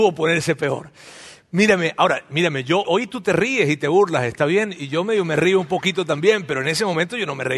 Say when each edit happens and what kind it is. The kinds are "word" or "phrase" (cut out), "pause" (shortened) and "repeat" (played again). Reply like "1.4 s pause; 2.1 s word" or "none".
2.8 s word